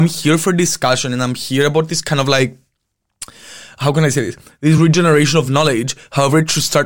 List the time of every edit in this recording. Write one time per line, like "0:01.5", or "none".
none